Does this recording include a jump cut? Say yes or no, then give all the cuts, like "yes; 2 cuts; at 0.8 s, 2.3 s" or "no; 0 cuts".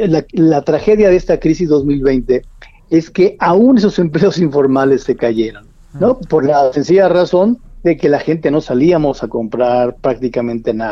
no; 0 cuts